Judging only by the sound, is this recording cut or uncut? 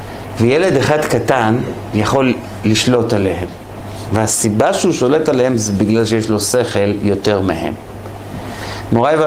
uncut